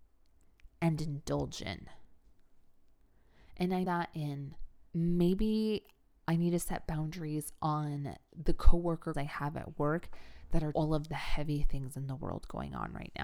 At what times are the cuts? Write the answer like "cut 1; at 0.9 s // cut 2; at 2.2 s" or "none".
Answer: cut 1; at 3.8 s // cut 2; at 4.9 s // cut 3; at 9.1 s // cut 4; at 10.7 s